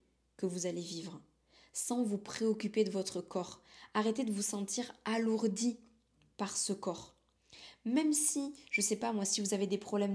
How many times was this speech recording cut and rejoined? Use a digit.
0